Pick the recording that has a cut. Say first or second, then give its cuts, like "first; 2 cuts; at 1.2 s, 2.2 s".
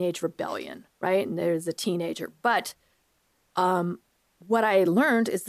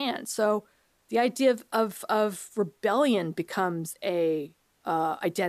first; 1 cut; at 0.9 s